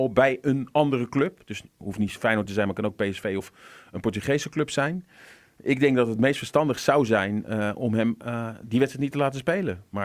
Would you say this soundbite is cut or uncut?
uncut